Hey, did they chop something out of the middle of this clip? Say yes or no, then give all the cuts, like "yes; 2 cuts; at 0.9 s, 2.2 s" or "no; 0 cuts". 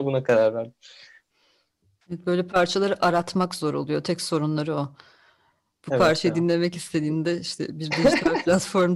no; 0 cuts